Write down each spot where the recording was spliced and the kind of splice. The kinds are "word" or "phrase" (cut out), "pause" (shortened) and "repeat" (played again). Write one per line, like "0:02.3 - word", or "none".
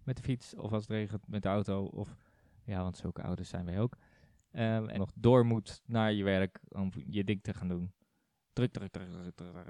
0:04.9 - phrase